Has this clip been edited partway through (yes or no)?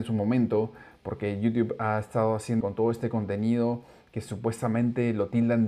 yes